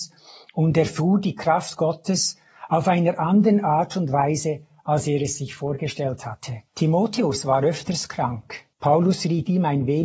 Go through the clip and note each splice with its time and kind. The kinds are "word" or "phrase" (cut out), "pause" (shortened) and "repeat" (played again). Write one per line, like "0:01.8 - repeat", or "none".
0:06.7 - pause
0:08.7 - pause